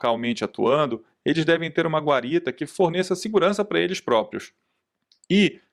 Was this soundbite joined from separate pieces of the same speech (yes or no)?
no